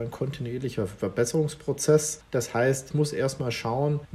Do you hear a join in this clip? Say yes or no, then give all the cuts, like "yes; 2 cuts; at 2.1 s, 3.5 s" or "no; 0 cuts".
no; 0 cuts